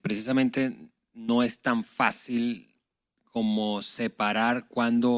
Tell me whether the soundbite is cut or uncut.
uncut